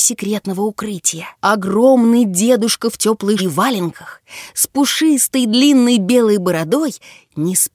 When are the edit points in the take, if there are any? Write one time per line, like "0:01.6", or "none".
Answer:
0:01.3
0:03.4